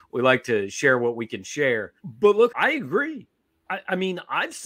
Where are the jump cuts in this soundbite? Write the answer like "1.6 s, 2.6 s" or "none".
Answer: 2.0 s, 2.5 s